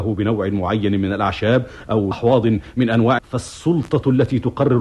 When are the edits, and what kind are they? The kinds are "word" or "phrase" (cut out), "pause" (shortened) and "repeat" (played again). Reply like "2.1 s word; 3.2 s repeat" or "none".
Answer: 2.1 s phrase; 3.2 s word